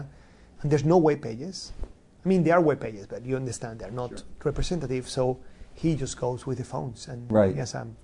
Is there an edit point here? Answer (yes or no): no